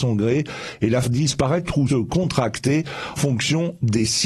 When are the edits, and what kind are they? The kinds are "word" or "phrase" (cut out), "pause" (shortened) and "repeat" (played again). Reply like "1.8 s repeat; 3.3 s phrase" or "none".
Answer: 1.0 s word; 1.9 s word; 3.2 s word

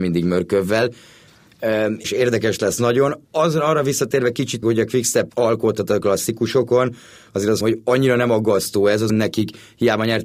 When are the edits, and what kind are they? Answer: 2.0 s word; 4.6 s word; 5.3 s word; 7.6 s word; 9.1 s word

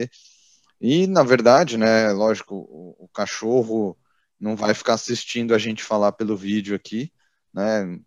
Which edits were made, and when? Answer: none

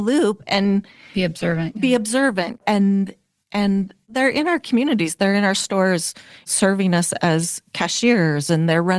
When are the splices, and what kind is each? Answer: none

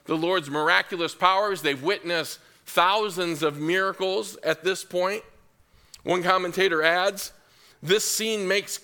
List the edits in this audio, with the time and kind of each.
none

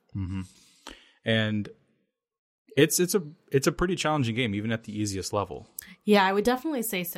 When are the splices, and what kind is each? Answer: none

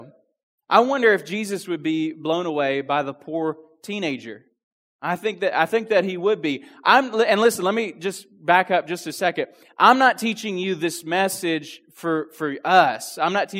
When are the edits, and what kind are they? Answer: none

